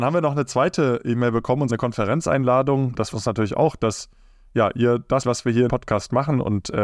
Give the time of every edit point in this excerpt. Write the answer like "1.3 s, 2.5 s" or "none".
1.7 s, 3.1 s, 5.2 s, 5.7 s